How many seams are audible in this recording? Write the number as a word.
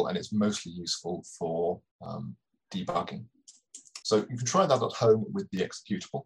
two